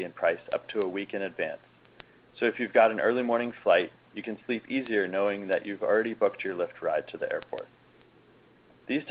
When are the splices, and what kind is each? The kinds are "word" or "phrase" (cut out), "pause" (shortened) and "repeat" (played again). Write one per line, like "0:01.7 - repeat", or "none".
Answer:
none